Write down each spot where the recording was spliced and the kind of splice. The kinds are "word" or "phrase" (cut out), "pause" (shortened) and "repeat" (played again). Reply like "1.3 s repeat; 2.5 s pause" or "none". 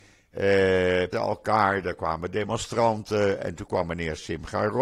1.1 s phrase